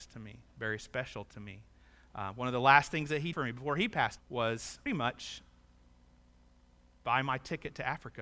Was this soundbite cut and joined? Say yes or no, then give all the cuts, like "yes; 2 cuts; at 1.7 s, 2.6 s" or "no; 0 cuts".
yes; 3 cuts; at 3.3 s, 4.2 s, 4.9 s